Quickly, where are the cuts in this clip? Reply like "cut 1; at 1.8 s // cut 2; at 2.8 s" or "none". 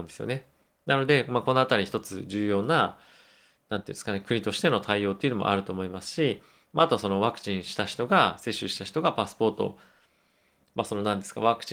none